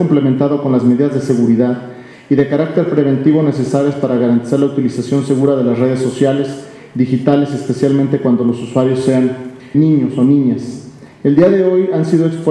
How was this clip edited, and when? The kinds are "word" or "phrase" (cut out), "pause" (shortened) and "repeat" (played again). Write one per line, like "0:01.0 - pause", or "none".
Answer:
0:09.7 - word